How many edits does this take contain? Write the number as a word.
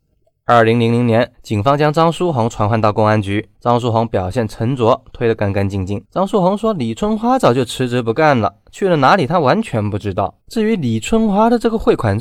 four